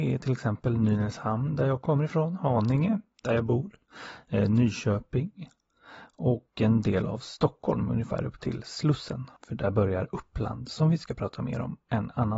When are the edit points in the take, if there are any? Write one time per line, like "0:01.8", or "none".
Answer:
0:09.4